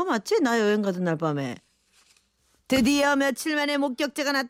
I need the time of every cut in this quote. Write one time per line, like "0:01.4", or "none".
none